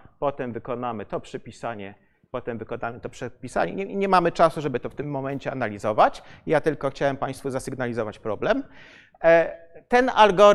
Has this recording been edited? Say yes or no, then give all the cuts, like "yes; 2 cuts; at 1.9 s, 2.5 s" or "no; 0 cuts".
no; 0 cuts